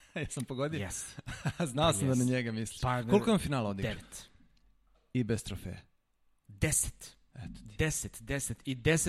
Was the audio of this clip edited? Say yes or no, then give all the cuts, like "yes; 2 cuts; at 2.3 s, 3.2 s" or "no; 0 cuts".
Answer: no; 0 cuts